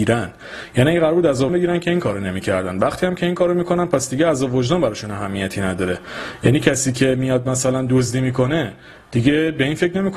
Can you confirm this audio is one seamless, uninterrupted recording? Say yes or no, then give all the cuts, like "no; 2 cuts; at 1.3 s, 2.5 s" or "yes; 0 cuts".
no; 1 cut; at 1.5 s